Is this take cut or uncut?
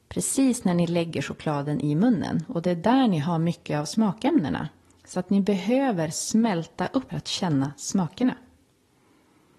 cut